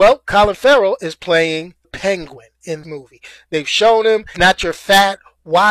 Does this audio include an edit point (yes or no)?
yes